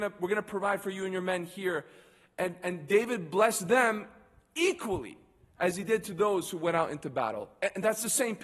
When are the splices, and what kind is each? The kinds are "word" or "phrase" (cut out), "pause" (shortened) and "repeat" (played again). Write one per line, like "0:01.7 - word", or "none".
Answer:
none